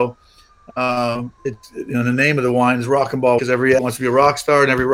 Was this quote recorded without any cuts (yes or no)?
no